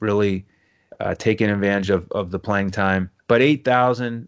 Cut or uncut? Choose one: cut